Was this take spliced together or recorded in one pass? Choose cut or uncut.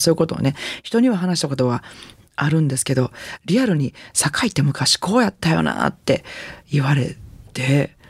uncut